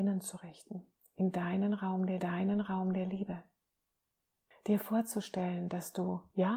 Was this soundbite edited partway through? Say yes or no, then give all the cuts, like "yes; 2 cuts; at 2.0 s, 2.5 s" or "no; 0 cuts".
yes; 2 cuts; at 1.0 s, 2.2 s